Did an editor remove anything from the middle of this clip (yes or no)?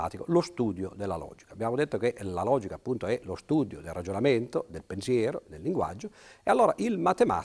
no